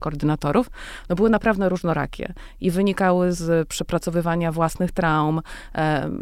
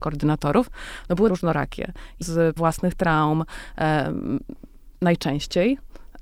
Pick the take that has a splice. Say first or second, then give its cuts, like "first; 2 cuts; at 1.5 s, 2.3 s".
second; 3 cuts; at 1.3 s, 2.2 s, 2.6 s